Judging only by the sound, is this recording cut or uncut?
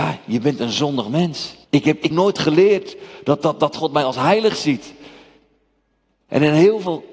cut